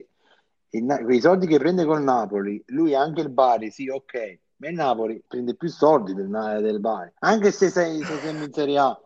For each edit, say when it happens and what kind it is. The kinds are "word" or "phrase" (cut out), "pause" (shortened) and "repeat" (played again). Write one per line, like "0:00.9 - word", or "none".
0:05.2 - pause
0:07.2 - pause